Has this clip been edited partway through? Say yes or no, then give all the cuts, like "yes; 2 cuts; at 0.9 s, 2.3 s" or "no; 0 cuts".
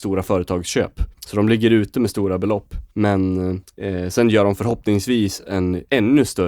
no; 0 cuts